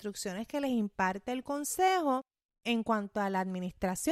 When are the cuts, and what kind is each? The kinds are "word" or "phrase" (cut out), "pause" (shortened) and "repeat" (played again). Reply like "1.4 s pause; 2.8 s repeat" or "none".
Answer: none